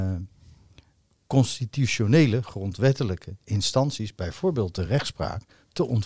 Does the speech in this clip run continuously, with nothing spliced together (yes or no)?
yes